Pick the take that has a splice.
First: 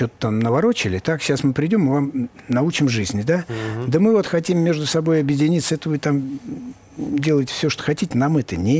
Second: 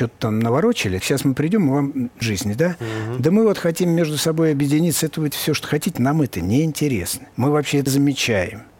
second; 5 cuts; at 1.0 s, 2.2 s, 5.3 s, 7.3 s, 7.9 s

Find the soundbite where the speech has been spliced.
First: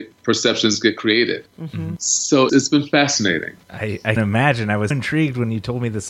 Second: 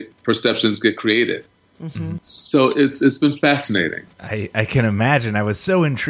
first; 4 cuts; at 1.5 s, 2.5 s, 4.2 s, 4.9 s

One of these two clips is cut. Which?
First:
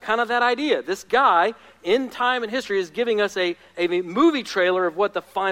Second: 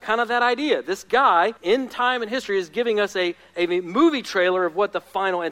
second; 1 cut; at 1.6 s

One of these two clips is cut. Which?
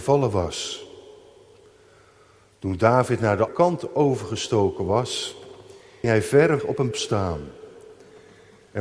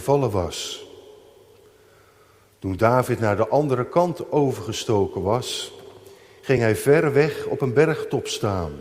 first; 4 cuts; at 3.5 s, 6.0 s, 6.6 s, 6.9 s

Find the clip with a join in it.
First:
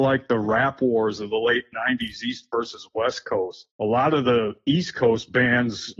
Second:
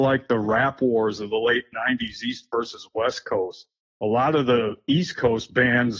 first; 1 cut; at 3.7 s

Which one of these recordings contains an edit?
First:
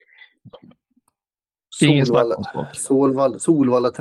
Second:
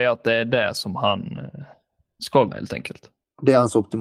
second; 1 cut; at 2.5 s

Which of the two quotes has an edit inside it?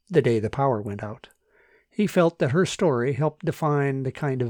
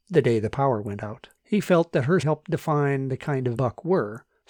second; 3 cuts; at 1.4 s, 2.2 s, 3.6 s

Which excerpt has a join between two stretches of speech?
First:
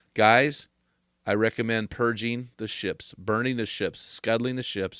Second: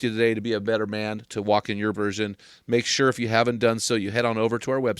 second; 1 cut; at 1.9 s

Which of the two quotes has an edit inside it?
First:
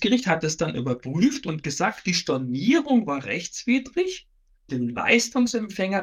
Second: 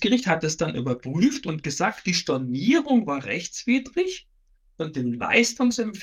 first; 1 cut; at 4.7 s

